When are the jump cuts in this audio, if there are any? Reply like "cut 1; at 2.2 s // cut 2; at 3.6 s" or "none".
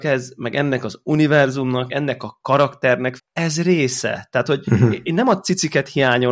cut 1; at 1.9 s // cut 2; at 3.2 s